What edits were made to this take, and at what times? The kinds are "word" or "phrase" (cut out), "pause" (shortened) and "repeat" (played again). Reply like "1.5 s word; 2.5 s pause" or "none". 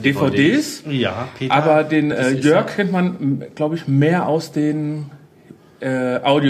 none